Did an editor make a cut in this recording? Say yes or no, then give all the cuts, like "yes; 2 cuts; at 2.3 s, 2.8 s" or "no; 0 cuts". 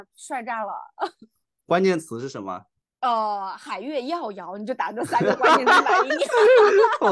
no; 0 cuts